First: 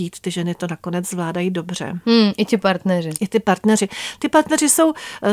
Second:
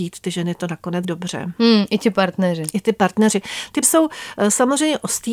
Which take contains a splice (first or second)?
second